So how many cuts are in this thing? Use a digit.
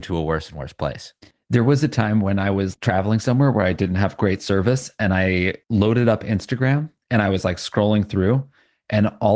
3